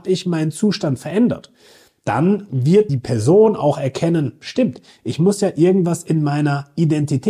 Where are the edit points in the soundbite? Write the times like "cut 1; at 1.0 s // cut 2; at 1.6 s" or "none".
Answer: cut 1; at 2.9 s // cut 2; at 4.4 s